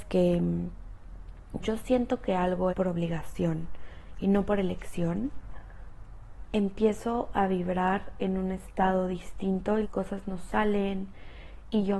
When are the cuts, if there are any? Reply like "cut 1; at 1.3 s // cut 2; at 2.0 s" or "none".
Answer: cut 1; at 1.6 s // cut 2; at 2.7 s // cut 3; at 9.8 s